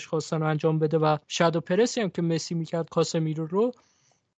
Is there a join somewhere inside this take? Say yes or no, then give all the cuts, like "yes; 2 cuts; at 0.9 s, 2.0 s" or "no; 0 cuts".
yes; 1 cut; at 1.2 s